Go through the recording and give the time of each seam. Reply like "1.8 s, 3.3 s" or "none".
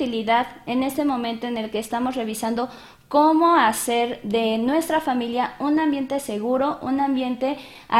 none